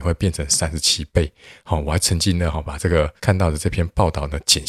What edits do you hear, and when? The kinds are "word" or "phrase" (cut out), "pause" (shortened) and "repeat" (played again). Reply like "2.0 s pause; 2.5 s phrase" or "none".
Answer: 3.2 s pause

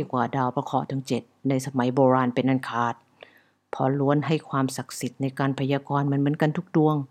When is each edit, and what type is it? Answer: none

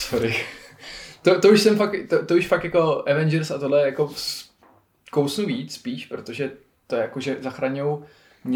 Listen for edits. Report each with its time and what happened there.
none

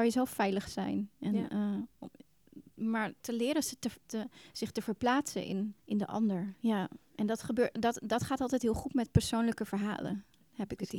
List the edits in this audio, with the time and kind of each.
3.2 s pause; 4.0 s pause; 5.8 s pause; 7.0 s pause

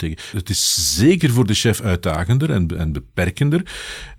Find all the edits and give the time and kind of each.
none

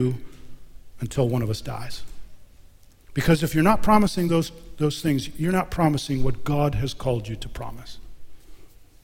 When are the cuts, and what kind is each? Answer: none

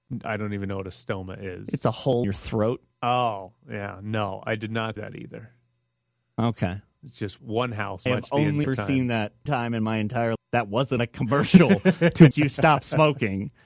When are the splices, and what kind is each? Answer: 2.2 s word; 5.0 s word; 7.4 s word; 8.1 s word; 8.6 s word; 9.5 s word; 10.4 s word; 11.0 s word; 12.3 s word

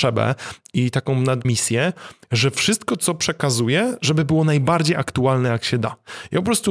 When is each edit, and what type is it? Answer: 1.4 s word

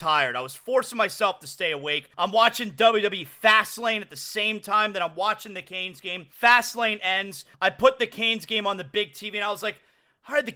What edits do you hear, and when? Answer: 2.1 s pause; 6.3 s pause; 7.5 s pause

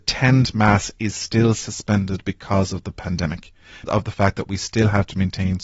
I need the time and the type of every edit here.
3.9 s word

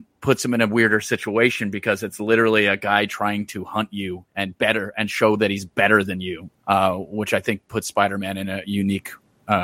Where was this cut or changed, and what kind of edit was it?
4.3 s pause; 6.6 s pause

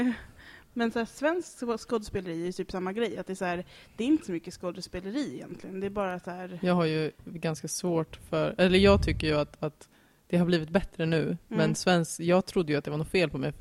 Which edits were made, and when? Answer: none

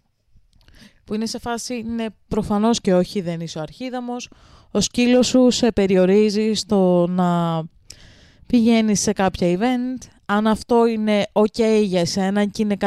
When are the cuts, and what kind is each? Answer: none

